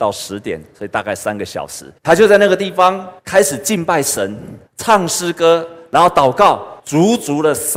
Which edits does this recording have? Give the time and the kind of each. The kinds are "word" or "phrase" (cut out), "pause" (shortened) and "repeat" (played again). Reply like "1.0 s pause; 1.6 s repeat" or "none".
2.0 s pause; 3.2 s pause; 4.7 s pause; 6.8 s pause